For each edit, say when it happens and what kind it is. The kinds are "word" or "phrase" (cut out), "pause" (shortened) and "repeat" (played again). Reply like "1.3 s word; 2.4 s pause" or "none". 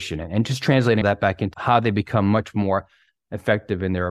1.0 s word; 1.5 s word